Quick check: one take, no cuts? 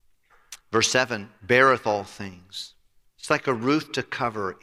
yes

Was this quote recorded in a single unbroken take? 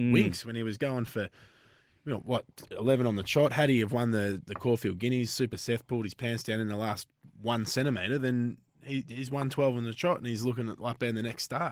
yes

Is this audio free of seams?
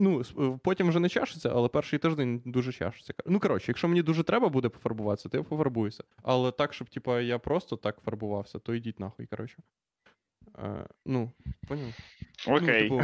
no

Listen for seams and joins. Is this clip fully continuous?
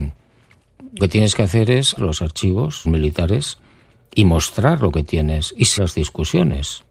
no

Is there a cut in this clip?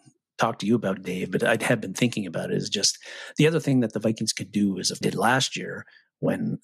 yes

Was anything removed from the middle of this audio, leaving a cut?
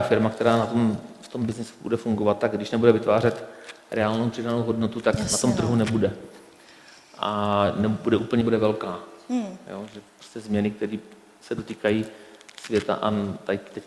yes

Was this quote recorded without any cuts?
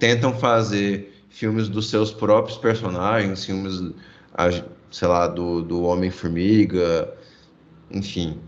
yes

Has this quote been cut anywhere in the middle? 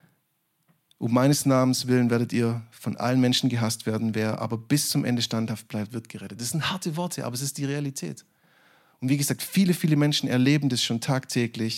no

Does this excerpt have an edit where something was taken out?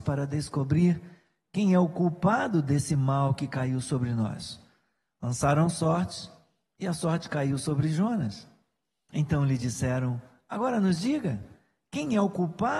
no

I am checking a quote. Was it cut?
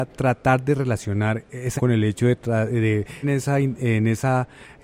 yes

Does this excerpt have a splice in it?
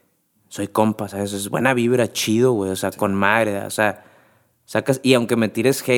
no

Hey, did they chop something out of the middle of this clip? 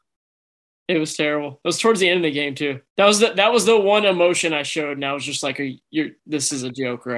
yes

